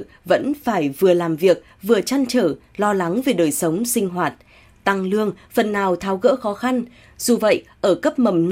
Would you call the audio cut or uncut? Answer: uncut